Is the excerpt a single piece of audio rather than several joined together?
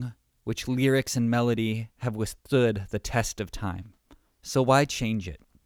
no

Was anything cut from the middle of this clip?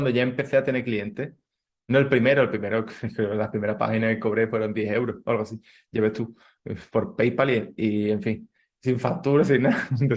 no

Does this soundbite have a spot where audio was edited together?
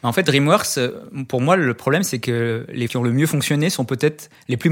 yes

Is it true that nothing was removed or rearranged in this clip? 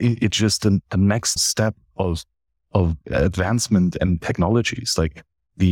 no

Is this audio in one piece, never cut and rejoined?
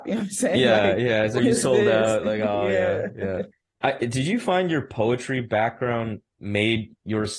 no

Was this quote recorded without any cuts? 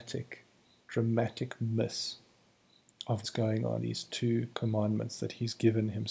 no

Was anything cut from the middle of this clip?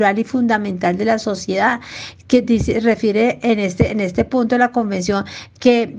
no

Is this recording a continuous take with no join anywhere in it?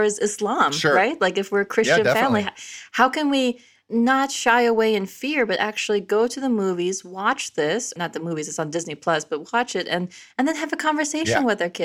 yes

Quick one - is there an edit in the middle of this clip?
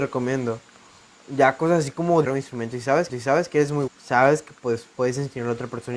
yes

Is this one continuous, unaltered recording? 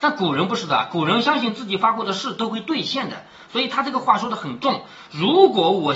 yes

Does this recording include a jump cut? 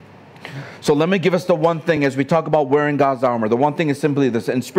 no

